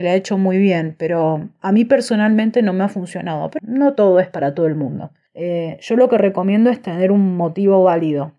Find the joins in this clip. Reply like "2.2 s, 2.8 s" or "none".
3.6 s